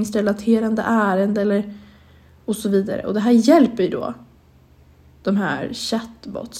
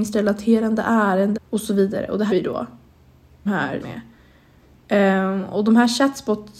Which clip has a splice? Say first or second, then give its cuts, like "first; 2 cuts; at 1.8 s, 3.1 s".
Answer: second; 4 cuts; at 1.3 s, 2.3 s, 3.5 s, 3.8 s